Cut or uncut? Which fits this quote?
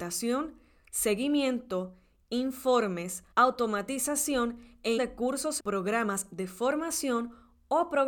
cut